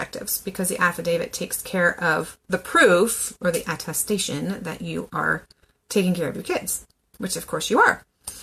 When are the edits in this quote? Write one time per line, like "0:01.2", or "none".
none